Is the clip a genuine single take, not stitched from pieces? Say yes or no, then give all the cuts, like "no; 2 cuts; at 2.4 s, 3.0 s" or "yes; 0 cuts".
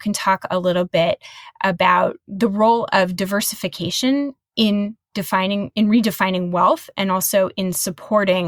yes; 0 cuts